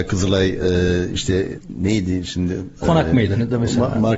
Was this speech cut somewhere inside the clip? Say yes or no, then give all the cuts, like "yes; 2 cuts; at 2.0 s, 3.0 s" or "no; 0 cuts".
no; 0 cuts